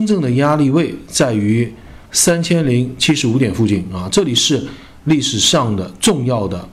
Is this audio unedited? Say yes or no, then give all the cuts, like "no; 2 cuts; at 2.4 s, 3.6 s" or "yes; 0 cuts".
no; 1 cut; at 2.1 s